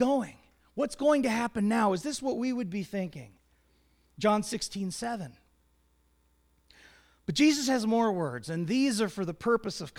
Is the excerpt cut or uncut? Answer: uncut